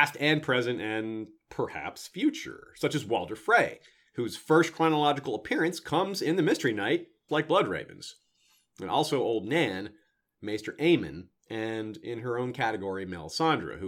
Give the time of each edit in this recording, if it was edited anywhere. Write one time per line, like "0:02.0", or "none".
0:07.3